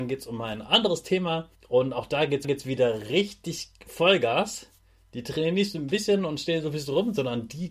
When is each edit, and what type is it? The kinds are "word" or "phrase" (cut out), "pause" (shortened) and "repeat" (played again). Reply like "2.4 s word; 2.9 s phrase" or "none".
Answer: 1.5 s pause; 2.4 s repeat